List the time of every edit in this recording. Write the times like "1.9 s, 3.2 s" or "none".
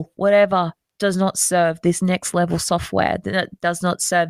none